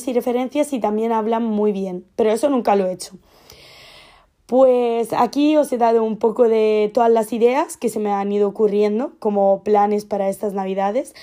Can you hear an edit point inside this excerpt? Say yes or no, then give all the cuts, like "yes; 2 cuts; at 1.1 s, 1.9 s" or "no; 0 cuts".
no; 0 cuts